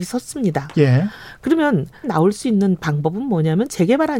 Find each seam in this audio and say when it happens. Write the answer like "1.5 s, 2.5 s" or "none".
2.0 s